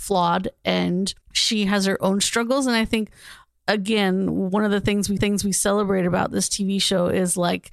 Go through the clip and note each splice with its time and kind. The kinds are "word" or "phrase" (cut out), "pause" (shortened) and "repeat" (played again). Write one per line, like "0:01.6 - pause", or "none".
0:01.2 - pause
0:03.6 - word
0:05.2 - repeat